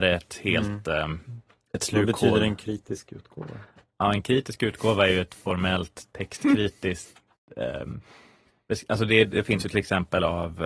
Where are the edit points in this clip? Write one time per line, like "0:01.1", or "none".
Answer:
none